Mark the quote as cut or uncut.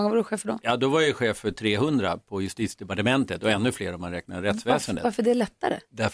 uncut